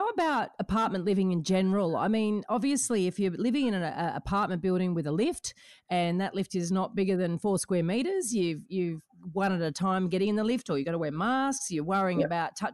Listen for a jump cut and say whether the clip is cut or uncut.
uncut